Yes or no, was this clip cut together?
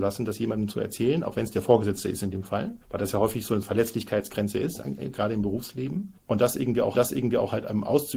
yes